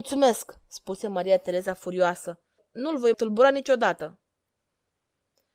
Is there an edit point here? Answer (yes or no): yes